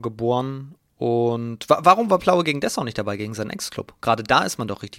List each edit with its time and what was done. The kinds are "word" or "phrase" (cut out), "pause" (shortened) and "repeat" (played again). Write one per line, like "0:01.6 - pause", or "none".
none